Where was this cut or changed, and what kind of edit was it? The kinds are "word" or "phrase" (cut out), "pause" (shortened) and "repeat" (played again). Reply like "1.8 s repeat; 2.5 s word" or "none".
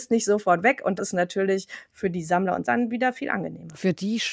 1.0 s word; 2.6 s word